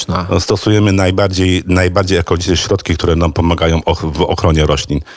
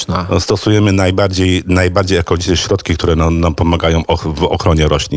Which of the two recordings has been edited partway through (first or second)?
first